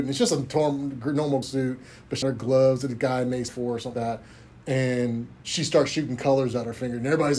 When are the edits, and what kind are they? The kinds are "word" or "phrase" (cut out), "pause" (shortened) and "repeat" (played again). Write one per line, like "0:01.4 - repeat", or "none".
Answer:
0:01.4 - word
0:02.2 - word
0:03.5 - word
0:03.9 - word
0:05.4 - pause